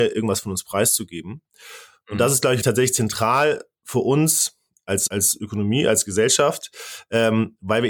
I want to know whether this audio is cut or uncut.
cut